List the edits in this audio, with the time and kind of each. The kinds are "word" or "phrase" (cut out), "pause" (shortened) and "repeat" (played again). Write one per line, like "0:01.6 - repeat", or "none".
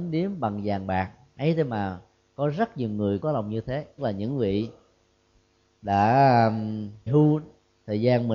0:03.2 - word
0:04.0 - word
0:07.1 - word